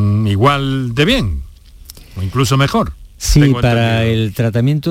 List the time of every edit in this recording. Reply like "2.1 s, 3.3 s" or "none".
none